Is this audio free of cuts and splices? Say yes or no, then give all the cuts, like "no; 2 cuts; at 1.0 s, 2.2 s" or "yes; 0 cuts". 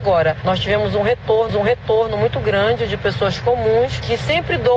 no; 1 cut; at 1.5 s